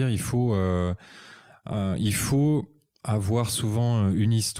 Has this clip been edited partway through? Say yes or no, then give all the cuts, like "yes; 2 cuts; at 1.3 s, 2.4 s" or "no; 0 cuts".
no; 0 cuts